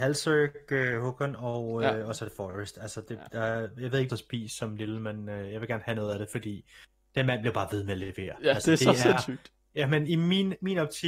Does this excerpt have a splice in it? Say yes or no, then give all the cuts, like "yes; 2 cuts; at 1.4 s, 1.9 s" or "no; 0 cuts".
yes; 1 cut; at 4.1 s